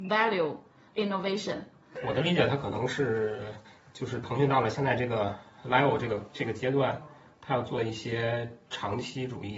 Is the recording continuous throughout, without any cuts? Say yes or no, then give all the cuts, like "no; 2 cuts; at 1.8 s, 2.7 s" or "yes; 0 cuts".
yes; 0 cuts